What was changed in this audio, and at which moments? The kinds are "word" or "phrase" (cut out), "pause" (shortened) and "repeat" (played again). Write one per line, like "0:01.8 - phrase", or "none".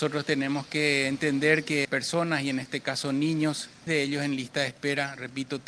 0:01.8 - word
0:03.9 - word

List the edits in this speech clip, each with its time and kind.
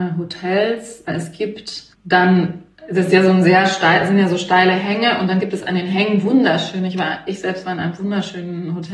0:01.9 - pause

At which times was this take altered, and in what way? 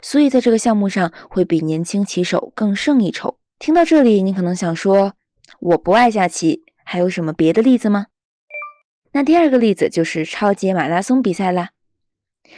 0:03.5 - pause

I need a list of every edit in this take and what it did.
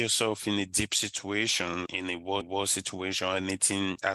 0:01.9 - word
0:02.4 - repeat

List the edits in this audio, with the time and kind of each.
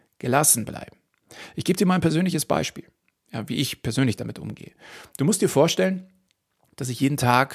none

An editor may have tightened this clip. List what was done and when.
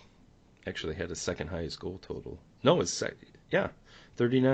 none

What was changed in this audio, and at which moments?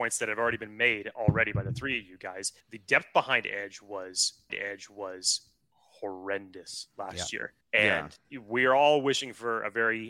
0:02.6 - pause
0:04.5 - repeat
0:07.6 - pause
0:08.2 - pause

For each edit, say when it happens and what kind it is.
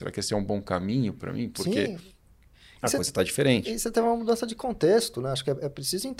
none

